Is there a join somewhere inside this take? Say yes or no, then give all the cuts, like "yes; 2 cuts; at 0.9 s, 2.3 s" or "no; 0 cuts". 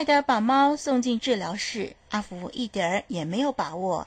yes; 1 cut; at 2.0 s